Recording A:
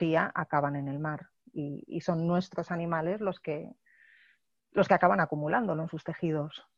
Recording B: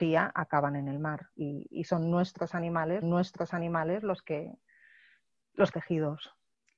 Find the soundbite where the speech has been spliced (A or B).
B